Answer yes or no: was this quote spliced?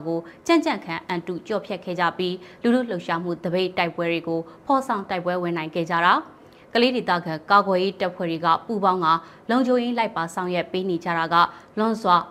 no